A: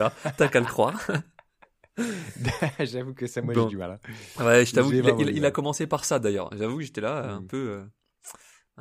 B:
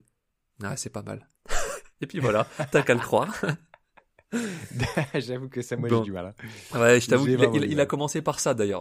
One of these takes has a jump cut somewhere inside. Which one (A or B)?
B